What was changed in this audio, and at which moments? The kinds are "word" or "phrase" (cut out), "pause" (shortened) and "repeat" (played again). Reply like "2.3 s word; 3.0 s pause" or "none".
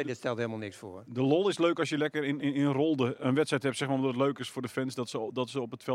none